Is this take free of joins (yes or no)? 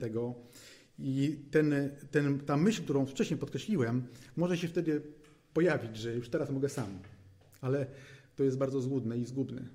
yes